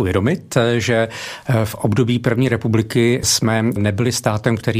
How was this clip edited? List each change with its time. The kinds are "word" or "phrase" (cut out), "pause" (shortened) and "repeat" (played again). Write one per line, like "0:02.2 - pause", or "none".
none

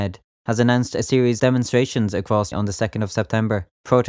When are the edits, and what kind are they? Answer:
0:01.4 - word
0:02.5 - word

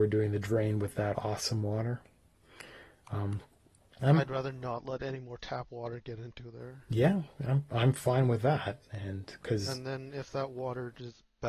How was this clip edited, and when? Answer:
0:01.1 - word

